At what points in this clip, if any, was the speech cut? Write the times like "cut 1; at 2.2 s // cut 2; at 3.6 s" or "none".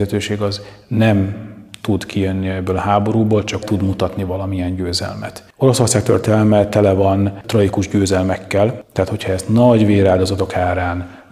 cut 1; at 3.6 s

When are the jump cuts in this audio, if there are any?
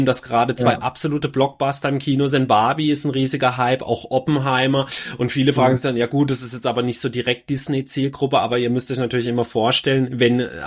none

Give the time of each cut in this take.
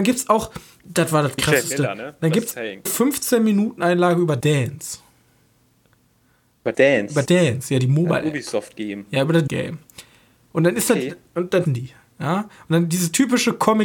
cut 1; at 2.9 s // cut 2; at 4.4 s // cut 3; at 6.7 s // cut 4; at 7.3 s // cut 5; at 9.5 s // cut 6; at 11.7 s

